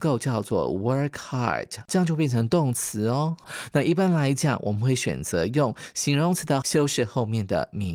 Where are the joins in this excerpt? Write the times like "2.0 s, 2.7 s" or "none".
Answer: 6.6 s